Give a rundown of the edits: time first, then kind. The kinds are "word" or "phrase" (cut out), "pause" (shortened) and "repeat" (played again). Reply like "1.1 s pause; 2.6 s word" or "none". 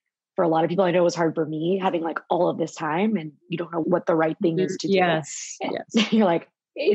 3.8 s word